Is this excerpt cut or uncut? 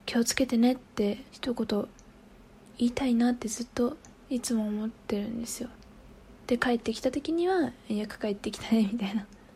cut